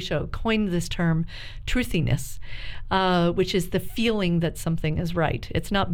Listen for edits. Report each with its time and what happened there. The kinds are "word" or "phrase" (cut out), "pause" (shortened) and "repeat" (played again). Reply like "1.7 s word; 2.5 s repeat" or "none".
none